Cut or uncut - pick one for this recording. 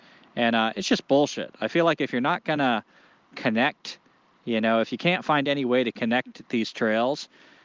uncut